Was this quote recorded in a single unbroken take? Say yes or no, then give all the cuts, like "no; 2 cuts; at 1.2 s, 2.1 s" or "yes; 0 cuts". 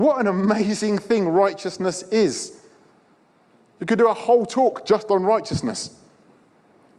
yes; 0 cuts